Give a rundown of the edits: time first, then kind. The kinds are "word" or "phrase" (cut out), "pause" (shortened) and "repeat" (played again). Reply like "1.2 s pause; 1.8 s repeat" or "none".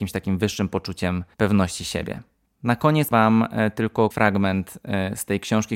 1.3 s pause; 3.1 s word; 4.1 s word